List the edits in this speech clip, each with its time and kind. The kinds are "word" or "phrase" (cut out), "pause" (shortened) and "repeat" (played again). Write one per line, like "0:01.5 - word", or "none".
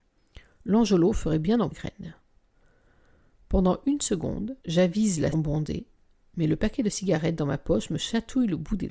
0:01.7 - phrase
0:04.6 - pause
0:05.3 - phrase